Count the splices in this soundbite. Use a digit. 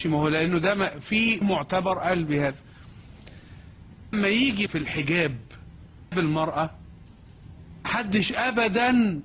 5